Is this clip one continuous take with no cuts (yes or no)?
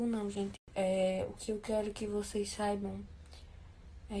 yes